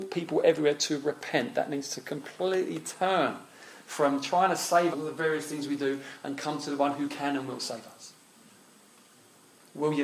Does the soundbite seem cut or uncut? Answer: cut